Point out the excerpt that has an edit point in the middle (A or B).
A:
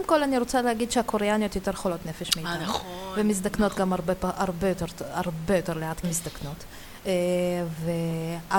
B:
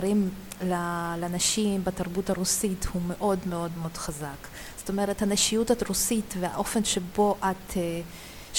A